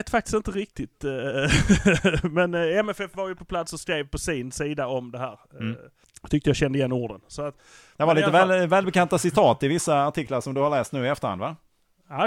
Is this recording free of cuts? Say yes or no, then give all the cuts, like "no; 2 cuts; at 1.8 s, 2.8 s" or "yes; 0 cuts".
yes; 0 cuts